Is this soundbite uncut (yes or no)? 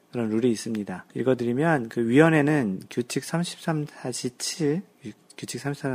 no